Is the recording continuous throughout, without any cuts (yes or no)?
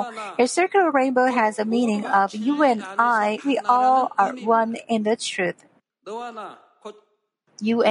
yes